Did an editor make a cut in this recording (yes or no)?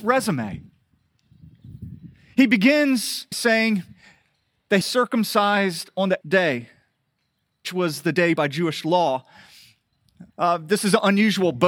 yes